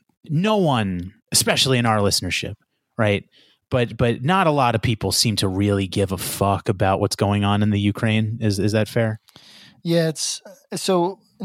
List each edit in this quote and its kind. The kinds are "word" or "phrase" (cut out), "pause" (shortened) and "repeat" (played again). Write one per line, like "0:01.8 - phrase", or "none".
0:01.2 - pause